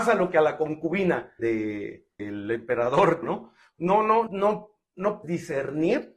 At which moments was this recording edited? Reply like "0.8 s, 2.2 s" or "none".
1.4 s, 2.2 s, 3.2 s, 4.3 s, 5.2 s